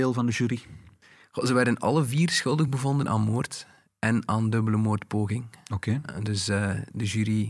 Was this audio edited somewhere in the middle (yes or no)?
no